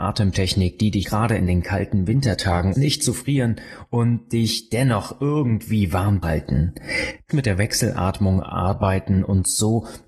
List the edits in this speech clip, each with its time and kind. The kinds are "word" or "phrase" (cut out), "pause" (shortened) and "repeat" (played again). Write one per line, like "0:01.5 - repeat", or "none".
0:01.0 - word
0:02.7 - word
0:06.2 - word
0:07.3 - word